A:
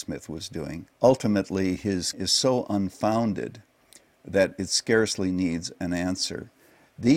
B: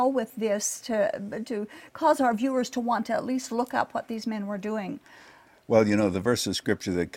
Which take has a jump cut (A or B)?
A